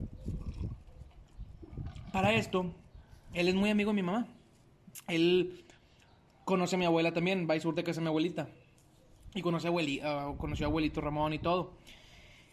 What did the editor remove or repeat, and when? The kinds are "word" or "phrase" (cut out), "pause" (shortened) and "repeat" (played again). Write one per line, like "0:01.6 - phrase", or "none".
none